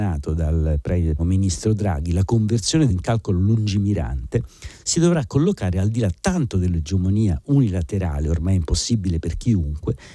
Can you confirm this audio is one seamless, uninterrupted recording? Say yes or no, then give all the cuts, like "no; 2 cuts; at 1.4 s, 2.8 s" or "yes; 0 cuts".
no; 2 cuts; at 1.2 s, 2.9 s